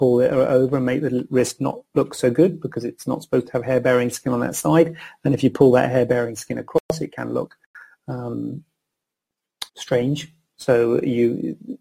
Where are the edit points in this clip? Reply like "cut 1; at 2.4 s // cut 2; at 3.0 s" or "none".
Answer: cut 1; at 9.7 s